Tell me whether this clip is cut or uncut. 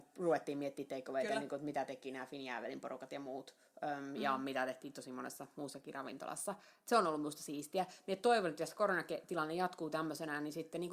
uncut